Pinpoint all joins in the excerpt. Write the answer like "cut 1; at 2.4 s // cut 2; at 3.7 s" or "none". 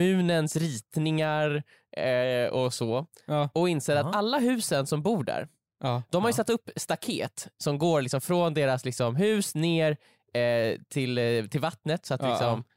none